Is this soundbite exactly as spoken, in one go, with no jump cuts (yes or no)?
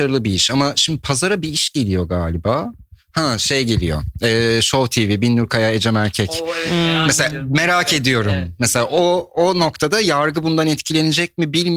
yes